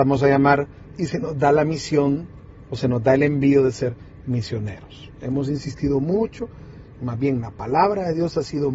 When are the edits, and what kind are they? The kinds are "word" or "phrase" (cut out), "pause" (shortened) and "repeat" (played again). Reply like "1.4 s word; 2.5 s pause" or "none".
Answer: 0.9 s word